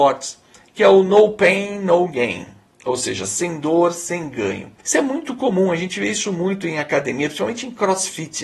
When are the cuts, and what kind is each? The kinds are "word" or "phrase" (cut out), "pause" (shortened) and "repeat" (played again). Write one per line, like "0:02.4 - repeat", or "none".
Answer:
0:04.8 - pause